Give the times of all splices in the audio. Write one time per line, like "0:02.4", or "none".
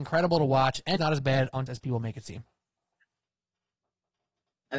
0:01.0
0:01.7